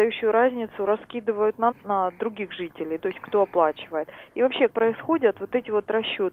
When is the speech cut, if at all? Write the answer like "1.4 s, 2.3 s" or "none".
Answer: 1.7 s, 3.0 s, 4.7 s